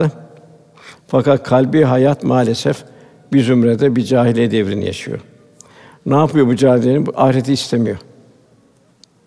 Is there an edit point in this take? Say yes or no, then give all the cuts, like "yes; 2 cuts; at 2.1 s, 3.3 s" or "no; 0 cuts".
no; 0 cuts